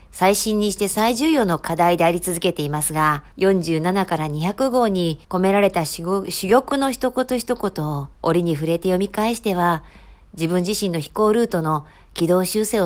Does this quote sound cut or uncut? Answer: cut